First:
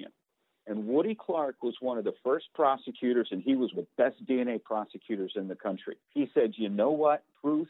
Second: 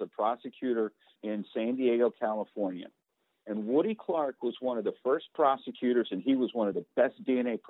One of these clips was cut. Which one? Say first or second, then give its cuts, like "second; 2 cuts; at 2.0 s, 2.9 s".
first; 2 cuts; at 3.7 s, 6.0 s